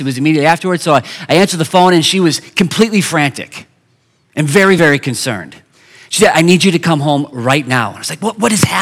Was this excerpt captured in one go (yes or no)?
yes